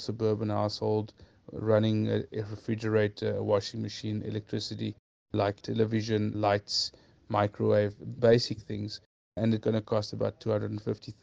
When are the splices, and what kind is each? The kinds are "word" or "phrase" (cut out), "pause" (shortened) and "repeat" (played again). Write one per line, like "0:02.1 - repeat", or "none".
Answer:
none